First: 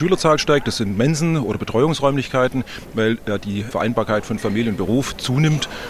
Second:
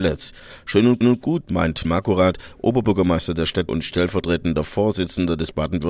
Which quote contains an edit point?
second; 3 cuts; at 1.0 s, 1.8 s, 3.7 s

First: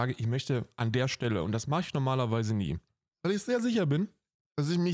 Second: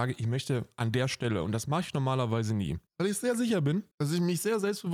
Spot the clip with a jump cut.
second; 2 cuts; at 2.9 s, 3.9 s

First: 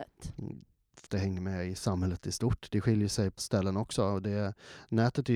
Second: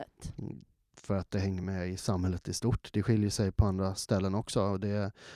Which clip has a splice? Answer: first; 2 cuts; at 1.1 s, 3.4 s

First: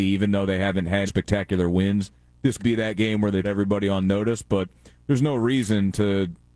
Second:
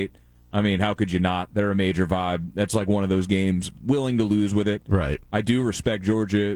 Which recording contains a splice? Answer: first; 3 cuts; at 1.1 s, 2.6 s, 3.4 s

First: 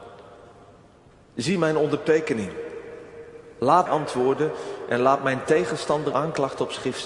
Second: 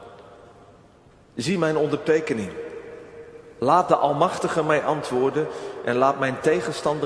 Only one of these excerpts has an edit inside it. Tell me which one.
first; 2 cuts; at 3.9 s, 6.1 s

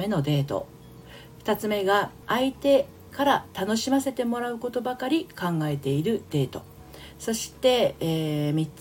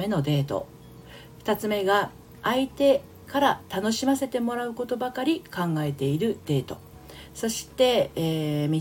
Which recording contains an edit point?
first; 1 cut; at 2.2 s

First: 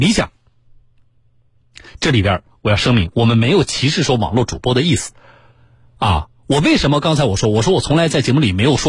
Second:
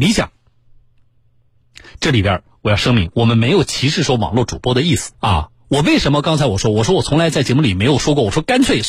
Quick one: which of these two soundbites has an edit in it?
second; 1 cut; at 5.1 s

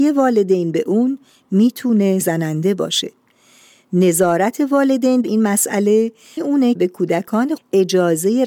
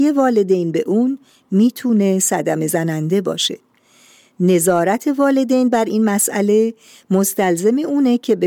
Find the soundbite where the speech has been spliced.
first; 5 cuts; at 2.2 s, 5.2 s, 6.4 s, 6.8 s, 7.6 s

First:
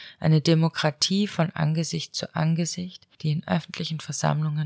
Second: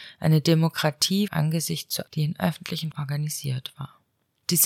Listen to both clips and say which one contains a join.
second; 3 cuts; at 1.3 s, 2.1 s, 2.9 s

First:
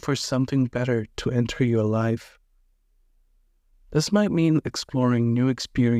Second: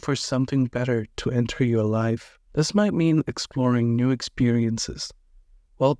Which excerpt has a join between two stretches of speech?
second; 1 cut; at 2.5 s

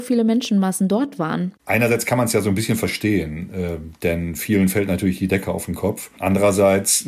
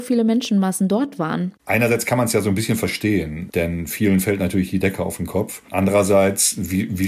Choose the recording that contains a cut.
second; 1 cut; at 3.5 s

